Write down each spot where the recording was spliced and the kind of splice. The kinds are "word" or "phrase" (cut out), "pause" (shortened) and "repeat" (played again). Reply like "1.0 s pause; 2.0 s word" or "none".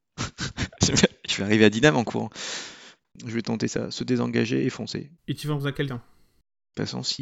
3.0 s pause; 5.2 s pause; 5.9 s word